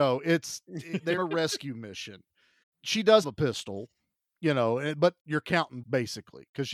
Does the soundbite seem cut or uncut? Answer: cut